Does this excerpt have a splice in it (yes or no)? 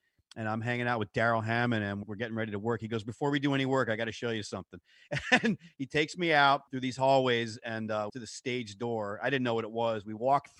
yes